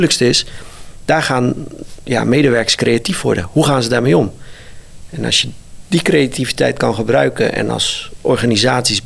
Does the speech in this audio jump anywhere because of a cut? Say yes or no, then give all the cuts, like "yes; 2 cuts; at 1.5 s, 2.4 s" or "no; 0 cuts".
no; 0 cuts